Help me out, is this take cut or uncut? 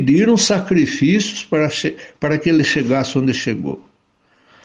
uncut